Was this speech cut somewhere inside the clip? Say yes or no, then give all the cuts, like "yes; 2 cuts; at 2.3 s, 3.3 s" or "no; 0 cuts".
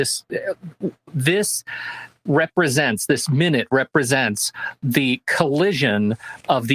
no; 0 cuts